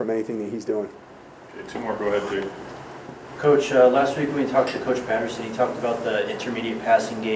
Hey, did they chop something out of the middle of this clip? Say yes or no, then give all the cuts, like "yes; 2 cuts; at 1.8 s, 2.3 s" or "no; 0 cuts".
no; 0 cuts